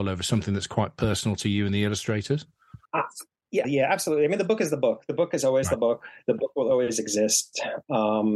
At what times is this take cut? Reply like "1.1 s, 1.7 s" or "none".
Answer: 2.9 s, 3.6 s